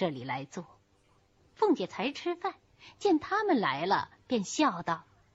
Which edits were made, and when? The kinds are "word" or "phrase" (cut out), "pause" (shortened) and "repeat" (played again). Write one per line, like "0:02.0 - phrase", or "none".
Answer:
none